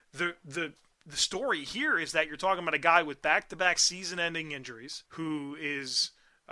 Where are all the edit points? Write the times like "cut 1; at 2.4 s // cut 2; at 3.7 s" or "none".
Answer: cut 1; at 5.1 s